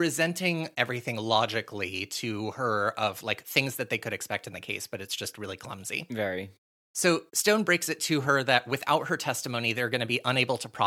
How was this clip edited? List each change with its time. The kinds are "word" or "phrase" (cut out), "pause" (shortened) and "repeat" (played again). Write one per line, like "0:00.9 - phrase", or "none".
none